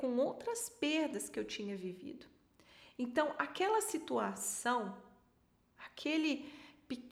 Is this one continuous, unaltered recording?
yes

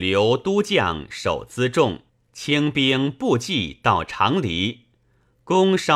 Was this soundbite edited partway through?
yes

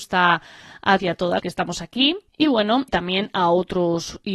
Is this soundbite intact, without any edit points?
no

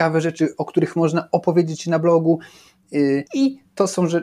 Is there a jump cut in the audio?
yes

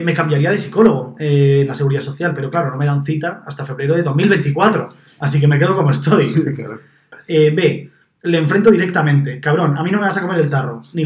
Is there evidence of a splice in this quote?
no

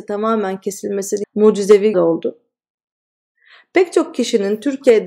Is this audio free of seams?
no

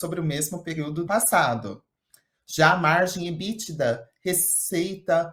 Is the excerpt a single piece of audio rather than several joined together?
no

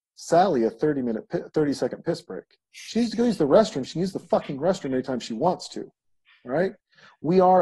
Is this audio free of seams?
yes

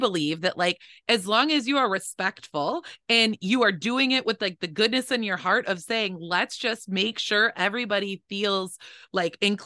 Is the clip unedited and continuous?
yes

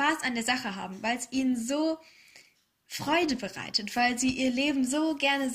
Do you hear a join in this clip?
no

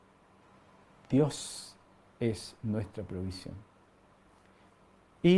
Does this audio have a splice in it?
no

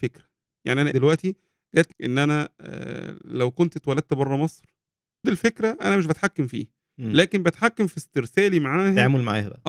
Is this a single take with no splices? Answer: no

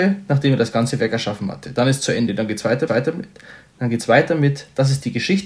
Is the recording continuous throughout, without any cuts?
no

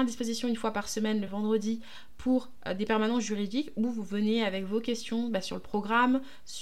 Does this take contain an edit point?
no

